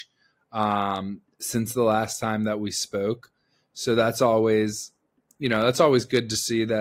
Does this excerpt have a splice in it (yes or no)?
no